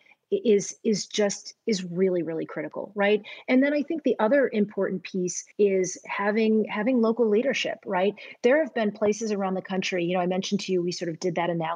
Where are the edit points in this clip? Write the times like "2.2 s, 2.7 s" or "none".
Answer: 5.5 s